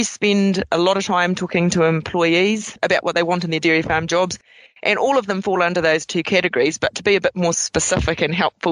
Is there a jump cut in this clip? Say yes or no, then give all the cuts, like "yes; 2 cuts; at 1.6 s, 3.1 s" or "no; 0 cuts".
no; 0 cuts